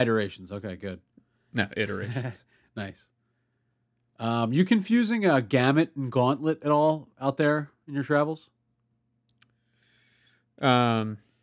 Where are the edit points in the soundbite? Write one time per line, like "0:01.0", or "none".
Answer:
none